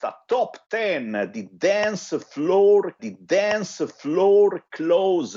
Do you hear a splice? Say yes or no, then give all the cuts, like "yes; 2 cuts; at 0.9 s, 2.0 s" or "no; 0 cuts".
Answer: yes; 1 cut; at 3.0 s